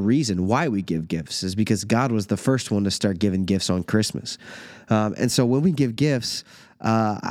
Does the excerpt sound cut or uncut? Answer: uncut